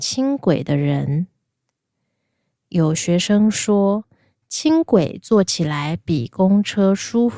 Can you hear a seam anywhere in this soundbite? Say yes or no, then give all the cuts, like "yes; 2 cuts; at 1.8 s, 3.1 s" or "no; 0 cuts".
no; 0 cuts